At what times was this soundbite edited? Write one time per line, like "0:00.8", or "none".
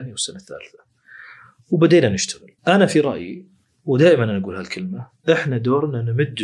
0:02.6